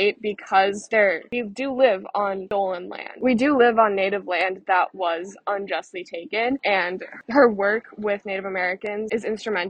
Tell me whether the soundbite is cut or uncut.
uncut